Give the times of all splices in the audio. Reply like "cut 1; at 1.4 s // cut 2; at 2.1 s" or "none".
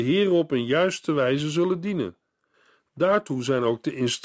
none